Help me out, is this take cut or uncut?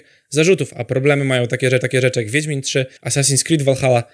cut